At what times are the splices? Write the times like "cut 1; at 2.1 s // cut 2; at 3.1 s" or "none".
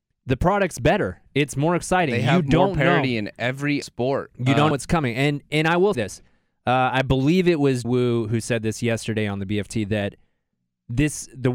cut 1; at 3.8 s // cut 2; at 4.7 s // cut 3; at 5.9 s // cut 4; at 7.8 s